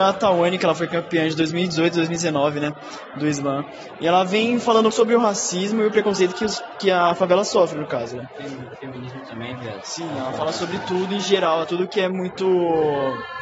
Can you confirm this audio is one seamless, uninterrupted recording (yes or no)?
no